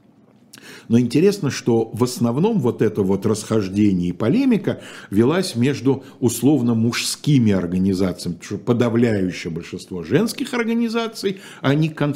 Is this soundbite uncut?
yes; 0 cuts

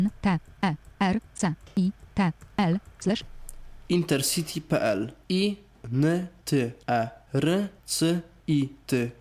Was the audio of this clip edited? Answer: yes; 2 cuts; at 2.5 s, 7.8 s

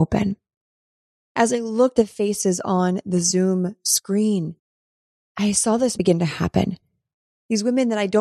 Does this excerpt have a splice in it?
yes; 2 cuts; at 1.9 s, 5.9 s

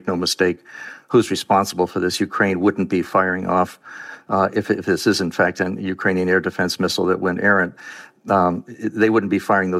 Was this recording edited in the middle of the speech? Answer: no; 0 cuts

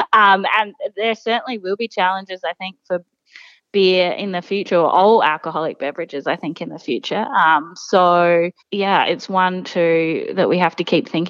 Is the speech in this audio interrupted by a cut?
yes; 1 cut; at 8.6 s

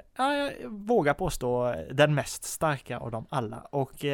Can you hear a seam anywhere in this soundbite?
no; 0 cuts

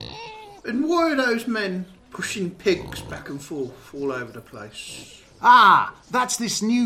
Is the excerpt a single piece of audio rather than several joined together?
yes; 0 cuts

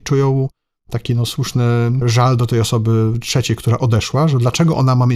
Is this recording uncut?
yes; 0 cuts

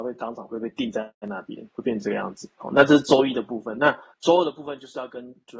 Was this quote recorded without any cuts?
no; 3 cuts; at 1.2 s, 1.7 s, 2.5 s

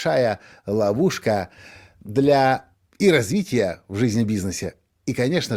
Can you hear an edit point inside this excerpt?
yes; 1 cut; at 2.7 s

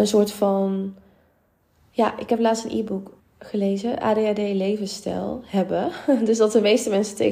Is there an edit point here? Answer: yes; 1 cut; at 3.2 s

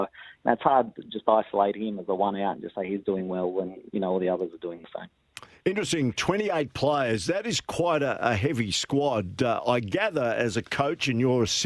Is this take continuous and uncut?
yes; 0 cuts

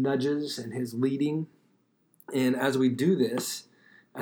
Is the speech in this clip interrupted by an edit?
no; 0 cuts

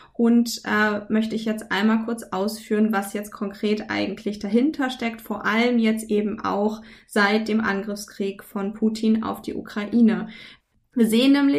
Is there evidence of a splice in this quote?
no; 0 cuts

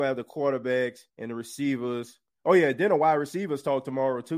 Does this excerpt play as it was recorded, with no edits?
no; 1 cut; at 1.1 s

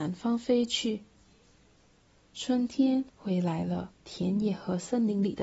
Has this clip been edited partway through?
yes; 2 cuts; at 3.1 s, 4.0 s

